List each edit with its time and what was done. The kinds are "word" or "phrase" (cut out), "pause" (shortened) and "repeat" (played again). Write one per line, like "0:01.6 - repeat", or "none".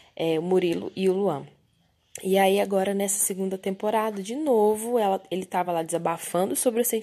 none